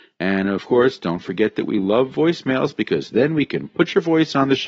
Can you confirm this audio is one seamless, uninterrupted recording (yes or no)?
yes